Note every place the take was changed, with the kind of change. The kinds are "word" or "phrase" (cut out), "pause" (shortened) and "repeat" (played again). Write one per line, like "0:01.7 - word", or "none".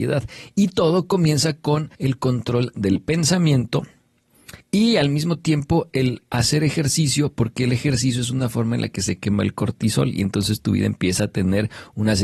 0:01.9 - pause
0:04.6 - pause